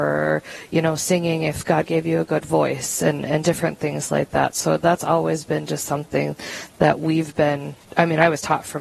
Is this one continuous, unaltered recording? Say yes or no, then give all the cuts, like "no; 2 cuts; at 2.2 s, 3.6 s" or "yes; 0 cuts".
yes; 0 cuts